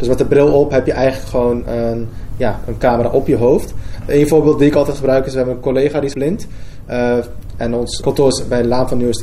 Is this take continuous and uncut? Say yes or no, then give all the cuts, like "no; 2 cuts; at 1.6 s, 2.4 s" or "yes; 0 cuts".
no; 2 cuts; at 6.1 s, 8.0 s